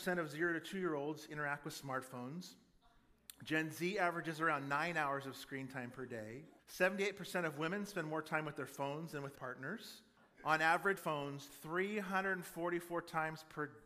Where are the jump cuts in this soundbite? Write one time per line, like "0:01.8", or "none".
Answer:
0:06.6
0:09.4
0:10.2
0:11.0